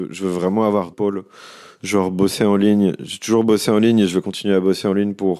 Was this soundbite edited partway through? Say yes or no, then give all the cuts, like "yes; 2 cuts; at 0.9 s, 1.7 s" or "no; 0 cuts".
yes; 1 cut; at 0.9 s